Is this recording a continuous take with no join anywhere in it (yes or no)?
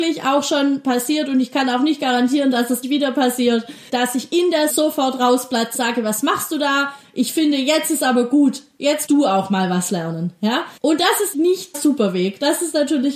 no